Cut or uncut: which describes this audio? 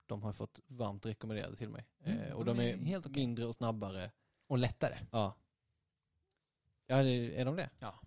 uncut